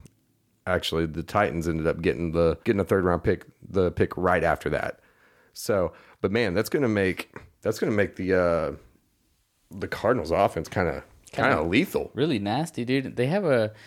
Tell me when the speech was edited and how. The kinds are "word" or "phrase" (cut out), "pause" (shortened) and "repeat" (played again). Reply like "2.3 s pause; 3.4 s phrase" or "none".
2.6 s pause